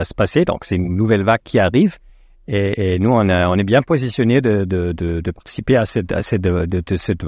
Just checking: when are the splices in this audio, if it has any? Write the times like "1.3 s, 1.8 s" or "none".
none

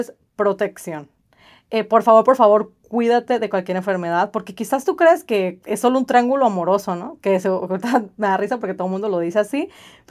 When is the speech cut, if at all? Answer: none

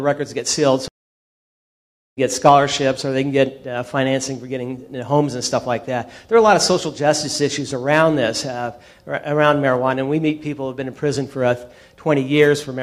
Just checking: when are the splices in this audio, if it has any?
none

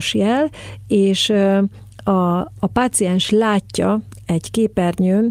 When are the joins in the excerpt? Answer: none

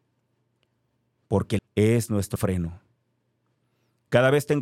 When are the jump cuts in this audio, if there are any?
1.6 s, 2.4 s

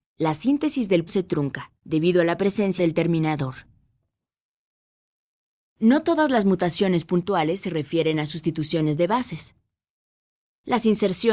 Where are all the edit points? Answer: 1.1 s, 1.8 s, 2.8 s

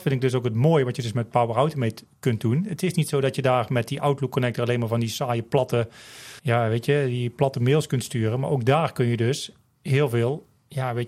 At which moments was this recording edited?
6.4 s

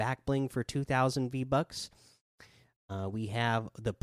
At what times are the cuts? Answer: none

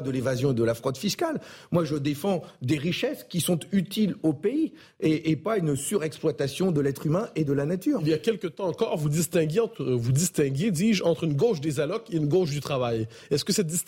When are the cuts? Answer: none

